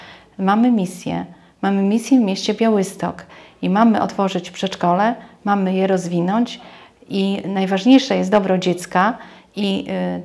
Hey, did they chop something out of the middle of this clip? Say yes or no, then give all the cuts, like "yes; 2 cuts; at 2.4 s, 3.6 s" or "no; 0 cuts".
no; 0 cuts